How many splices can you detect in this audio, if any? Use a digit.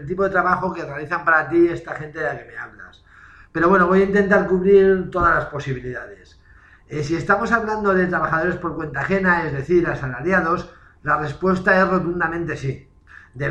0